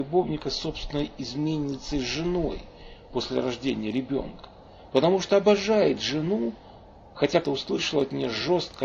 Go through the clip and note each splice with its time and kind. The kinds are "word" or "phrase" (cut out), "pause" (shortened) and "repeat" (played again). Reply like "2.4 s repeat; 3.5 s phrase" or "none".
7.4 s word